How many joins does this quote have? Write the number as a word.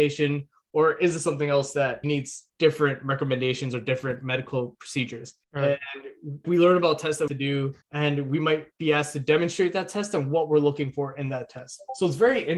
six